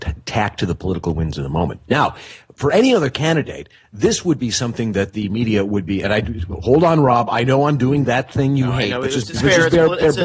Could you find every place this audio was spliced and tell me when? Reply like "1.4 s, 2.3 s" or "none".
none

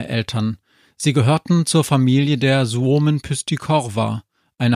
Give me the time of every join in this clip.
none

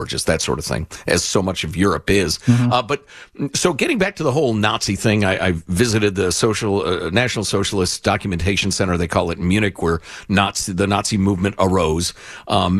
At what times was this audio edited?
none

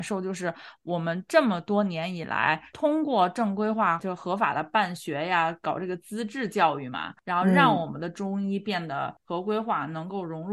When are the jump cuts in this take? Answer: 4.0 s

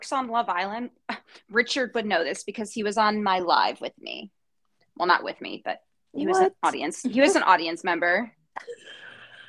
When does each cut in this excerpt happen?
none

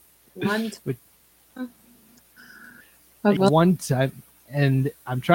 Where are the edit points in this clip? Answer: 3.4 s

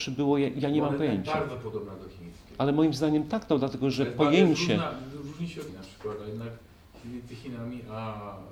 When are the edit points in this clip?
5.7 s

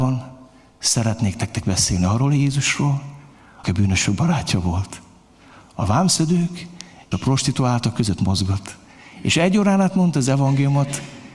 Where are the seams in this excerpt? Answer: 3.6 s, 7.1 s

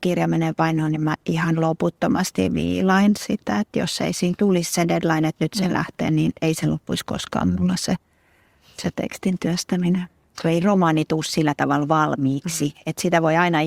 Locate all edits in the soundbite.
none

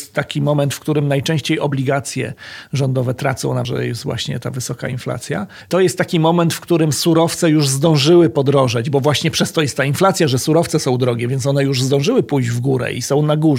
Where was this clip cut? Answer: 3.6 s

